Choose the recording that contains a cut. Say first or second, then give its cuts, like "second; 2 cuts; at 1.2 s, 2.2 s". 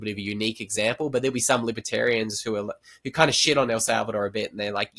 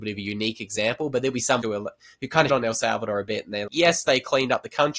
second; 3 cuts; at 1.6 s, 2.5 s, 3.7 s